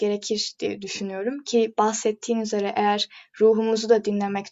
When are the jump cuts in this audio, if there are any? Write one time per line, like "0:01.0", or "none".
none